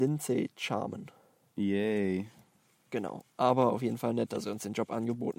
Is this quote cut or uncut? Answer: cut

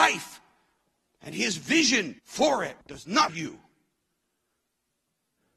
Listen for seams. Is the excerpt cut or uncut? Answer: cut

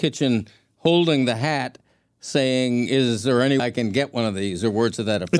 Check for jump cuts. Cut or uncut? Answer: cut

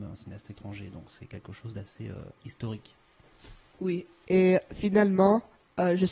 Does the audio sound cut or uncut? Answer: uncut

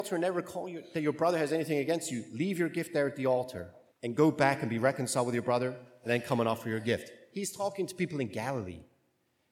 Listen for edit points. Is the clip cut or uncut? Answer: cut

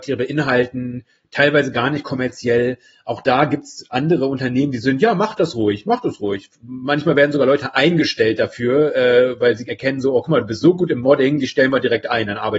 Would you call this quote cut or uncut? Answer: cut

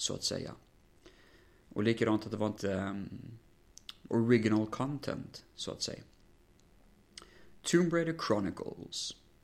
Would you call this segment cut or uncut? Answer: cut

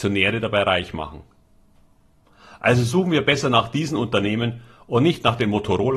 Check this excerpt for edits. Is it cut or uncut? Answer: uncut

